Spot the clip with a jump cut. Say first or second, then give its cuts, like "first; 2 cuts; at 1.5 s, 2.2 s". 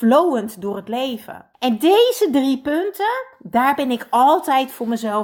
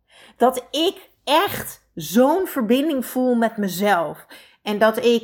first; 1 cut; at 1.5 s